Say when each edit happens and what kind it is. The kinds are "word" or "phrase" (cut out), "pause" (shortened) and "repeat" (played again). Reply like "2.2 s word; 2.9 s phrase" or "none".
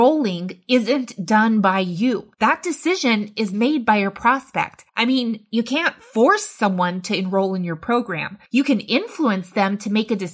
2.3 s pause; 4.9 s pause; 8.5 s pause